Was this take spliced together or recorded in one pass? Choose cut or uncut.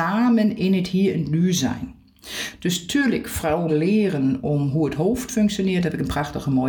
cut